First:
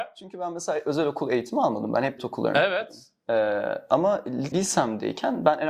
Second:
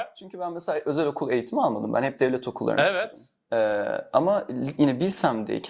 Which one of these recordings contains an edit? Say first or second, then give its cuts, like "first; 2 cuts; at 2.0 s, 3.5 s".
first; 2 cuts; at 2.2 s, 4.5 s